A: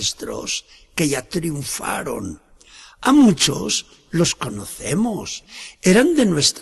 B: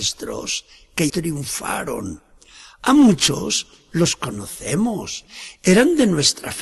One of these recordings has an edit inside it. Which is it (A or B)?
B